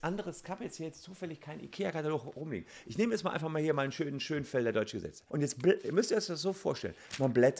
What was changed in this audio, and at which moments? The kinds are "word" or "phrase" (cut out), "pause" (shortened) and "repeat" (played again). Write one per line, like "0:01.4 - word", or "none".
0:05.3 - pause

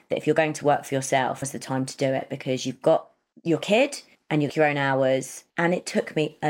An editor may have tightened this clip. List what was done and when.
0:01.4 - word
0:03.3 - pause
0:04.1 - pause
0:04.5 - phrase
0:05.5 - pause

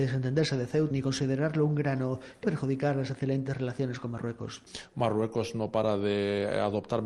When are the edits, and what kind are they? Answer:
0:00.9 - word
0:02.4 - word

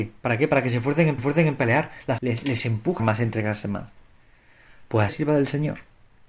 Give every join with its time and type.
0:01.2 - repeat
0:02.2 - phrase
0:03.0 - phrase
0:05.1 - phrase

